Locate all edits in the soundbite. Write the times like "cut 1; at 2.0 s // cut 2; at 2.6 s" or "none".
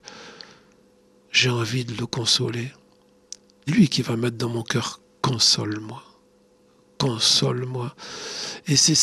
cut 1; at 3.7 s